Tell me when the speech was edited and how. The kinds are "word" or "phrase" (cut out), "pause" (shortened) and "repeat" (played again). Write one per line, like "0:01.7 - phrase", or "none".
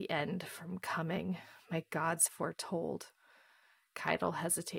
0:02.3 - word

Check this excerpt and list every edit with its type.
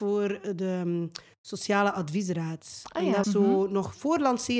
0:03.2 - word

